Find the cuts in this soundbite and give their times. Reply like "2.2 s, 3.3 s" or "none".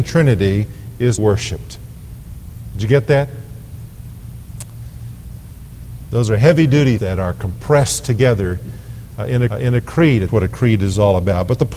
1.2 s, 7.0 s, 9.5 s, 10.3 s

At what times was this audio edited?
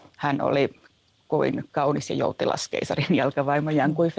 none

